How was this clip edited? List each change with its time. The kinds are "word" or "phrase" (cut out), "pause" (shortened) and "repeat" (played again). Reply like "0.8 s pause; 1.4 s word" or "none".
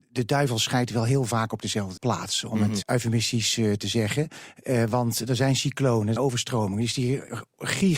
2.0 s word; 2.8 s word; 6.2 s word